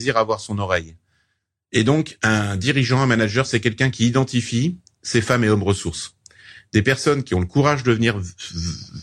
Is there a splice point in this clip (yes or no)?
no